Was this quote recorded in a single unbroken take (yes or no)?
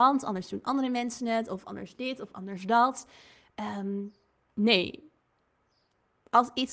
yes